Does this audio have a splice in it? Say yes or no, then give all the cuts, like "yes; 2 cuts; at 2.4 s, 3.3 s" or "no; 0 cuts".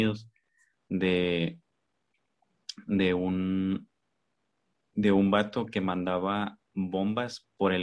no; 0 cuts